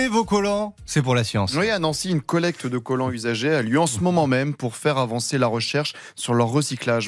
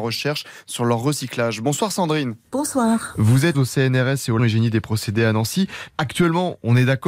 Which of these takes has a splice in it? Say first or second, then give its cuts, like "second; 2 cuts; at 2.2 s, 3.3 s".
second; 2 cuts; at 3.5 s, 4.4 s